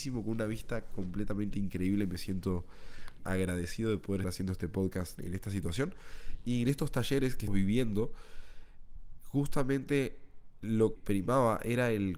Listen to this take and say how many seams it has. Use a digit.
6